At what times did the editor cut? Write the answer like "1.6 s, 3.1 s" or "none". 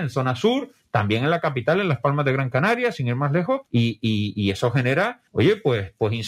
3.7 s, 5.3 s